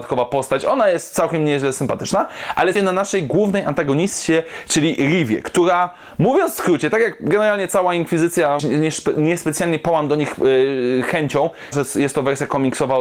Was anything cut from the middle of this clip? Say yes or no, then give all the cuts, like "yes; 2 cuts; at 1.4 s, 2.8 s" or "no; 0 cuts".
yes; 3 cuts; at 2.8 s, 8.6 s, 11.7 s